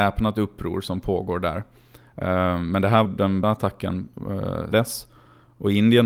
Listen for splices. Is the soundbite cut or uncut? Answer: cut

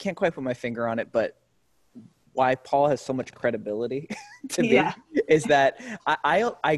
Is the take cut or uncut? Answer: uncut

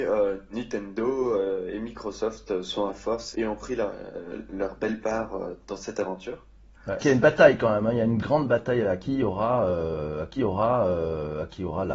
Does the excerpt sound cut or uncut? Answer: cut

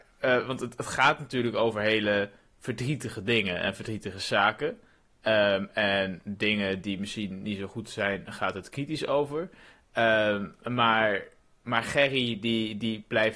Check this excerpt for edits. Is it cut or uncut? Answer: uncut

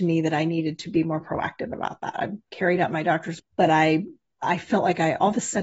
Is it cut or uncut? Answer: cut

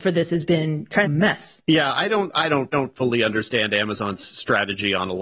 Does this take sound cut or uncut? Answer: cut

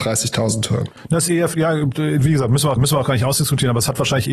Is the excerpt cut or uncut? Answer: cut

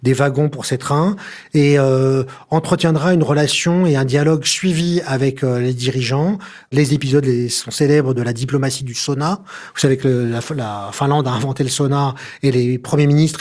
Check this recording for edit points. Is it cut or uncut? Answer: uncut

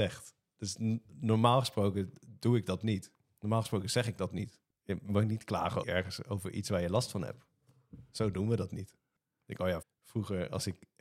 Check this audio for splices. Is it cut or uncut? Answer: cut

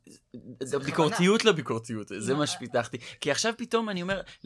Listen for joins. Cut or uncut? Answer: uncut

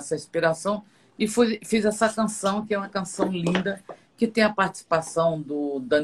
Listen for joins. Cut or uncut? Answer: uncut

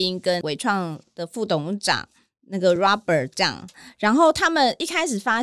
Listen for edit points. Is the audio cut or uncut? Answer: uncut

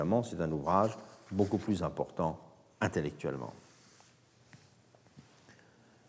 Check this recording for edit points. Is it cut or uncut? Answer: uncut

